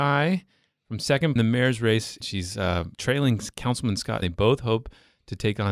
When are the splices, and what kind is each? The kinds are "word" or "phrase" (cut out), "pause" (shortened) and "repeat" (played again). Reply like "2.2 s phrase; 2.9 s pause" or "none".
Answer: 1.4 s phrase; 2.2 s word; 2.9 s pause; 4.2 s word

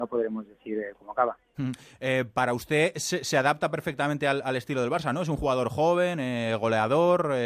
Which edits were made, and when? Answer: none

